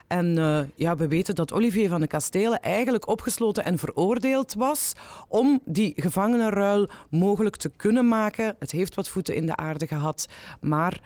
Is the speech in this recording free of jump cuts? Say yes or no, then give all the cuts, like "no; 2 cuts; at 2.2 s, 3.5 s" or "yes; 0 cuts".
yes; 0 cuts